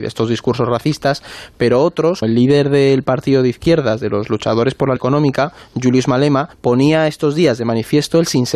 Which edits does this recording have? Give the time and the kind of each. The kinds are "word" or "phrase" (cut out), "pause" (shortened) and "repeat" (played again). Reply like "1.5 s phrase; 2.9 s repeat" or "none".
2.2 s word; 5.0 s word; 6.5 s pause